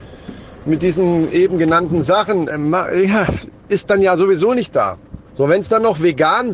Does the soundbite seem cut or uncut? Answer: cut